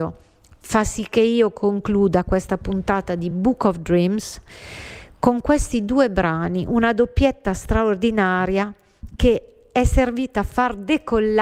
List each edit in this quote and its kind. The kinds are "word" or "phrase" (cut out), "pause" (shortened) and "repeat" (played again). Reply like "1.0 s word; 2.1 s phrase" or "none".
none